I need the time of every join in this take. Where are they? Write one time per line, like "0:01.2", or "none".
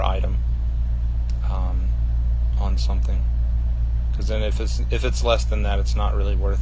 none